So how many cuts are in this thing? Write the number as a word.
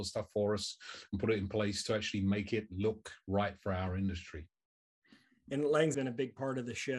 one